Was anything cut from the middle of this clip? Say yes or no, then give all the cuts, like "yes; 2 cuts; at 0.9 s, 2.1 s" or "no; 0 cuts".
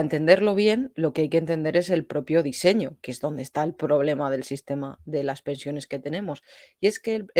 no; 0 cuts